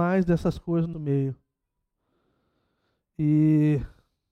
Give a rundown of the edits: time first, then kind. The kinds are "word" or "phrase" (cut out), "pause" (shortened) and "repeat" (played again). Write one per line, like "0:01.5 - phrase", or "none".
0:00.9 - word